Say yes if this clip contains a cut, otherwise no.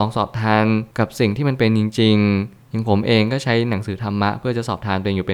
yes